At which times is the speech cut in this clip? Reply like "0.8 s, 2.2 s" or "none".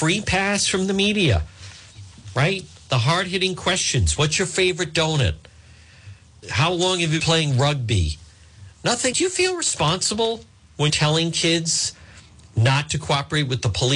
6.4 s, 7.2 s, 9.1 s, 10.9 s

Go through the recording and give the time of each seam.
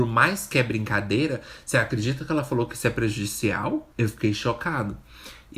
3.9 s

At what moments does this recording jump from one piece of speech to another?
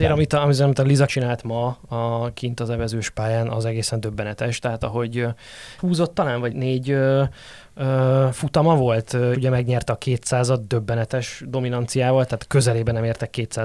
1.1 s, 5.8 s, 6.5 s, 9.3 s

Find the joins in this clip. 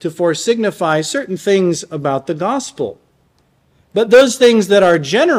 none

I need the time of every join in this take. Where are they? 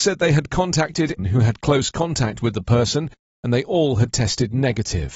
1.2 s

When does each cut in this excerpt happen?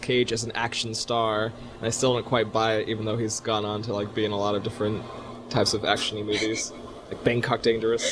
none

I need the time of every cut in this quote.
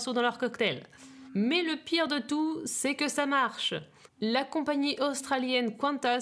none

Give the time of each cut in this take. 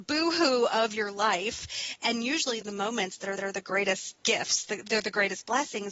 2.6 s, 3.4 s, 4.2 s

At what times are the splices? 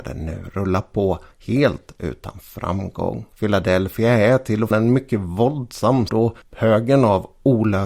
1.3 s, 3.3 s, 4.7 s, 6.1 s, 6.4 s

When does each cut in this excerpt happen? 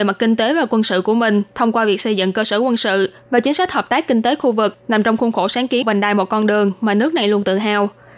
5.8 s

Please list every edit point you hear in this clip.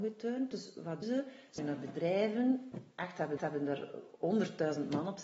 1.0 s, 1.6 s, 3.4 s

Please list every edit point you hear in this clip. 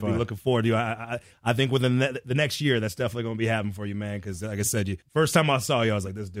5.0 s

